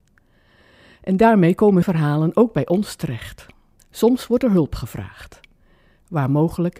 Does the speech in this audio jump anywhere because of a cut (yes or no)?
yes